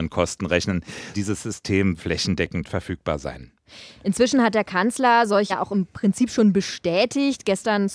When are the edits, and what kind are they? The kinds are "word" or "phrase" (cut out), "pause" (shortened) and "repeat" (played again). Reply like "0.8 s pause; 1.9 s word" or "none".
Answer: 1.1 s word; 2.0 s word; 5.5 s word